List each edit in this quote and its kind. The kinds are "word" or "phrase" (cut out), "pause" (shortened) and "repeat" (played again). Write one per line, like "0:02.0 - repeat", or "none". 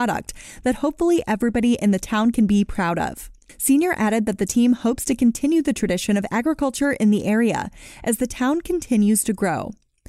none